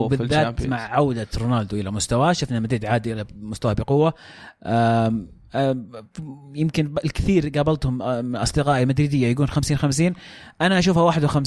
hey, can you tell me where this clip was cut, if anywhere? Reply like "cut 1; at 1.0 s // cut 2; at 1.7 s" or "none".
none